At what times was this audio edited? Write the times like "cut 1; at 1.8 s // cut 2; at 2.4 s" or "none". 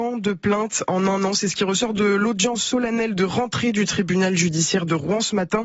none